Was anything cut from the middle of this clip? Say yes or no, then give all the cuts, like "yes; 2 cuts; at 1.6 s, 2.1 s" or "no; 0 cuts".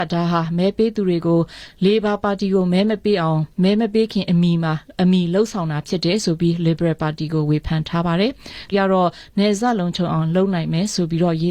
yes; 2 cuts; at 3.5 s, 8.7 s